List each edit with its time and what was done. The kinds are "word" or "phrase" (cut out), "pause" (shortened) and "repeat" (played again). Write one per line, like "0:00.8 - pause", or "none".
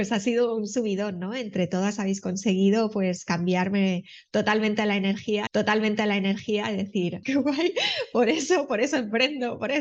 0:05.5 - repeat
0:07.2 - word